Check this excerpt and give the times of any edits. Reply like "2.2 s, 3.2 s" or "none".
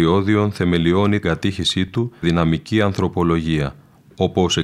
1.2 s, 2.2 s